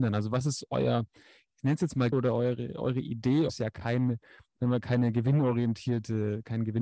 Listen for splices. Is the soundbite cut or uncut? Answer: cut